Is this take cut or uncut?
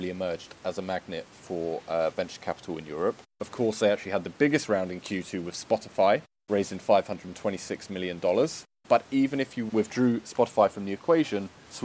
uncut